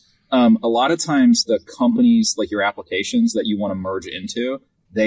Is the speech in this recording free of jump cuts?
yes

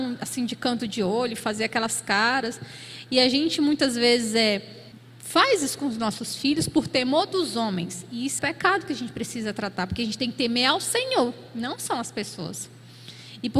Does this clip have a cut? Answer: yes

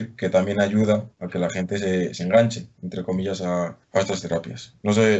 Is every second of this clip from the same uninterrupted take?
no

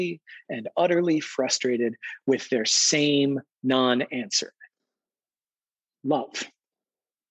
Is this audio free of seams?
yes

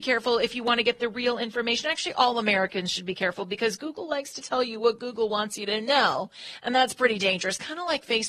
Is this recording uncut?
yes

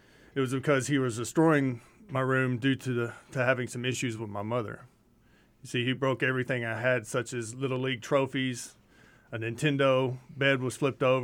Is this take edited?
no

